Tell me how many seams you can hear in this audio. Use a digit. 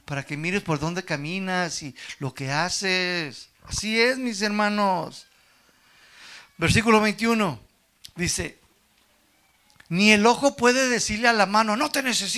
1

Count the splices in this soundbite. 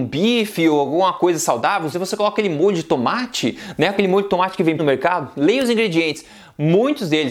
2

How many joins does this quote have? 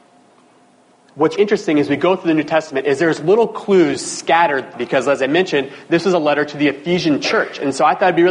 2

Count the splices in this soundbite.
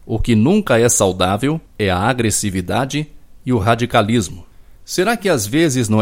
1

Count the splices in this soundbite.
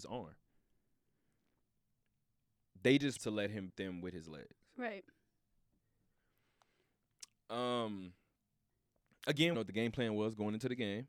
3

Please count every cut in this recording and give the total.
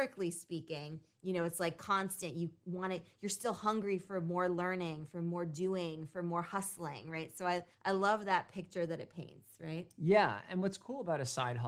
1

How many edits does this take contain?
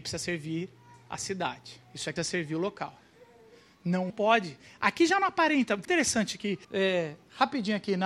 5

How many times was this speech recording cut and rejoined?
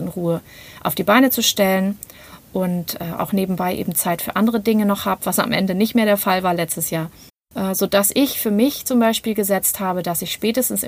1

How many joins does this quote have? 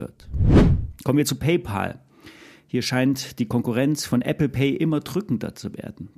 0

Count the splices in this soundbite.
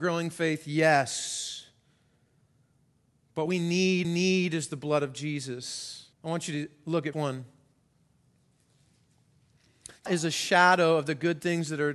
5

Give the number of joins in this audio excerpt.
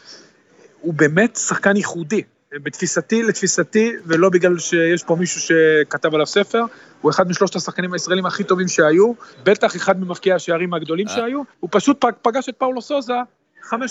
3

